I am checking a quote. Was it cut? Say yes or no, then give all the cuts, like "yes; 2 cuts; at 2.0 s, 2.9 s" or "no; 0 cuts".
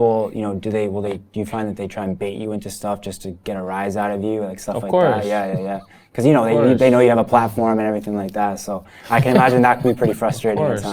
no; 0 cuts